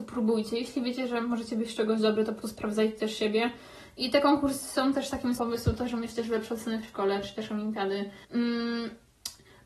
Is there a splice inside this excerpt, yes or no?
yes